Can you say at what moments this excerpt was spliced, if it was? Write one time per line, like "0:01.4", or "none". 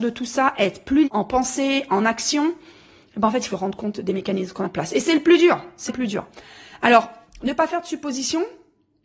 0:01.0
0:03.5
0:04.6
0:05.9

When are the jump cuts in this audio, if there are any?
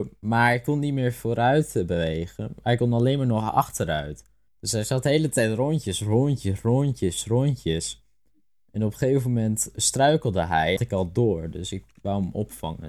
0:04.5
0:10.8

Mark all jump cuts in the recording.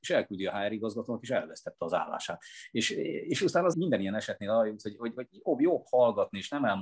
0:03.7

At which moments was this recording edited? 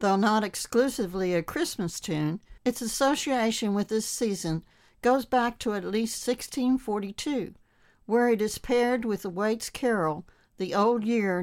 0:02.6

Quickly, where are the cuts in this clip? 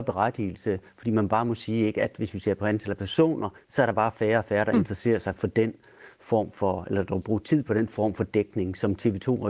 0:03.6

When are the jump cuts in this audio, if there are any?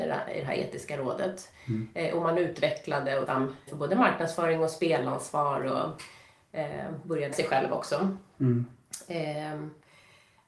0:03.3
0:03.7
0:07.3

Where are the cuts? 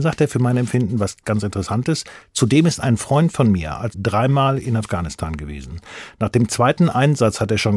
0:03.9

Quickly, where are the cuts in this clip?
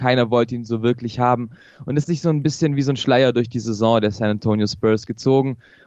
0:02.0

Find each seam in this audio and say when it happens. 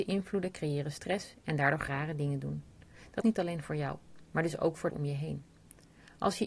0:01.9
0:03.2
0:04.9

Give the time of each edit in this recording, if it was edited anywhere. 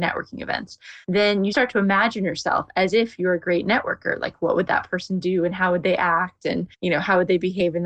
0:01.0
0:01.5
0:06.7

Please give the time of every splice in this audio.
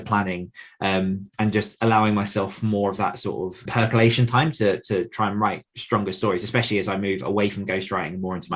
0:01.3
0:03.7
0:05.7

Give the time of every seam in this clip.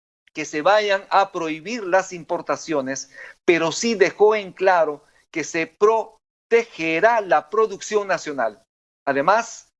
none

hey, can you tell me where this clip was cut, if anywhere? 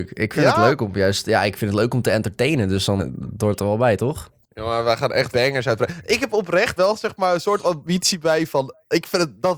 0:03.0
0:05.3
0:06.8

